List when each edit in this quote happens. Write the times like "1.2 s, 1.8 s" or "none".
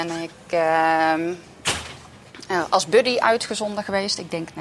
none